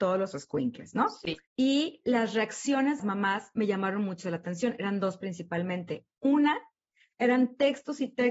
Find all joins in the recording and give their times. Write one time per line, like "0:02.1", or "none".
0:01.5
0:03.0